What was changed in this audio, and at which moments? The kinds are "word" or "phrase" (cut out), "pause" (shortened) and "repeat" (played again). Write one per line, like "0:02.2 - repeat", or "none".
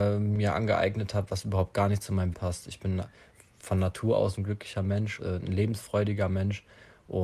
0:02.3 - word
0:04.4 - word
0:05.2 - word